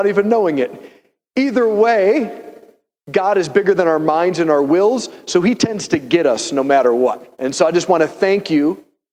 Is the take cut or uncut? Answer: cut